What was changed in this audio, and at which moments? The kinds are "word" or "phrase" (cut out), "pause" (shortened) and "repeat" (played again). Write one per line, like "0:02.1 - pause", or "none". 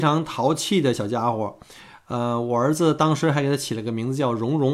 none